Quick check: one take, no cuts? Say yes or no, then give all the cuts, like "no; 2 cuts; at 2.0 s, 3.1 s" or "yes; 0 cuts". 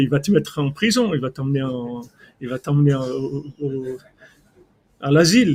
yes; 0 cuts